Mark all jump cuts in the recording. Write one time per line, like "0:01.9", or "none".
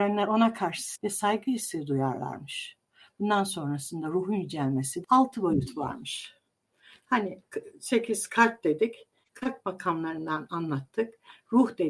0:01.0
0:05.0